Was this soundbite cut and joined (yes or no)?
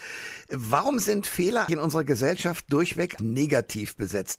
yes